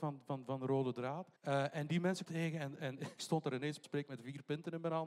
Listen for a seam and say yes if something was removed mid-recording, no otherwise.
yes